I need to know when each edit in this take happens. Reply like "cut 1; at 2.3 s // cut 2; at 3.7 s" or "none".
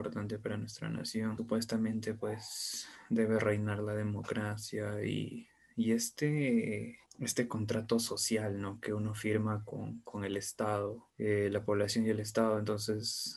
cut 1; at 11.1 s